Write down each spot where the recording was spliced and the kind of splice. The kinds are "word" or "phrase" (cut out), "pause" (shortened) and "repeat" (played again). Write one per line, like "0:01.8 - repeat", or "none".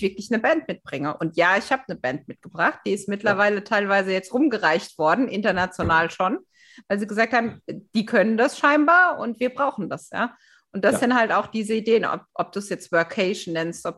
none

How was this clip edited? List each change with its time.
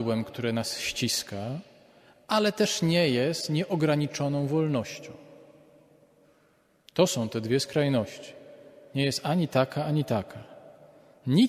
none

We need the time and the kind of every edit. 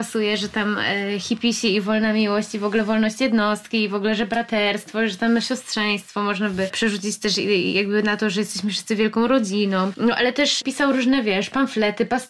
none

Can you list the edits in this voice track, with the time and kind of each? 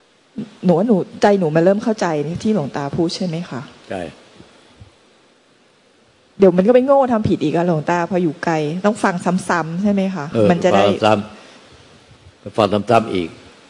none

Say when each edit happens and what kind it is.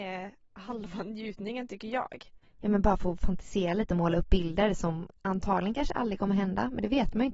0:05.2 - pause

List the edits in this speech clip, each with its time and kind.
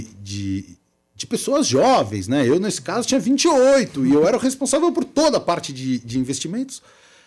none

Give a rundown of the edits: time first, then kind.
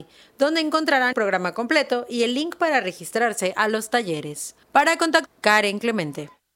0:01.1 - word
0:04.6 - pause
0:05.3 - word

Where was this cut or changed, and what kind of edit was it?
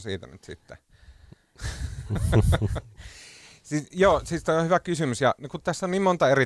0:05.4 - word

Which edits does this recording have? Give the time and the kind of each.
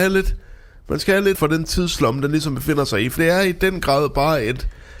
0:01.3 - word
0:03.2 - word

